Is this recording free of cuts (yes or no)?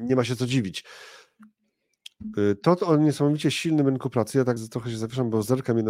no